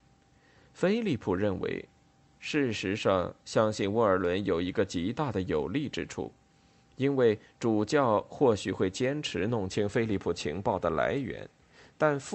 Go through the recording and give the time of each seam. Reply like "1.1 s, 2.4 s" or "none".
none

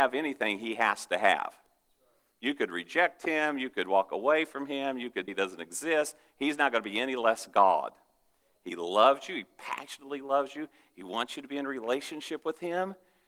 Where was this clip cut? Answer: 5.3 s

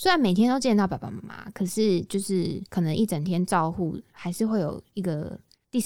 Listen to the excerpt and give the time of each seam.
2.7 s

